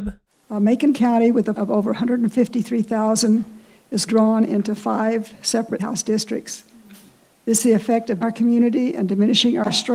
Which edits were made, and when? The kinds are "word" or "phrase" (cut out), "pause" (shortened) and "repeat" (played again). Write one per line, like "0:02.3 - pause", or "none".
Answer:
0:00.9 - word
0:01.5 - word
0:04.1 - word
0:05.8 - word
0:07.6 - word
0:08.2 - word